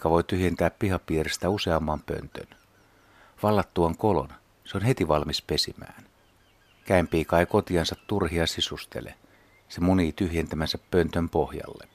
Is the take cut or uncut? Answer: uncut